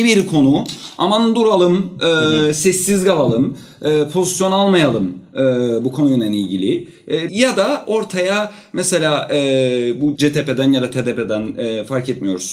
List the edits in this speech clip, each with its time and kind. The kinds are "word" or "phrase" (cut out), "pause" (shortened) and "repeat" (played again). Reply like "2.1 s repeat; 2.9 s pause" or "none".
7.3 s phrase; 10.2 s word